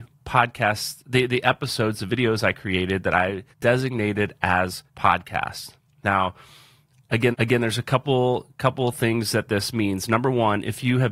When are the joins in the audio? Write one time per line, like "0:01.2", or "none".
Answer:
0:03.5
0:04.9
0:07.3